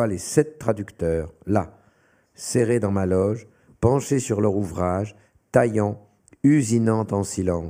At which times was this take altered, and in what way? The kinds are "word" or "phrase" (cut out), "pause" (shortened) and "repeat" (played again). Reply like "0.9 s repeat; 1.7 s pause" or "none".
none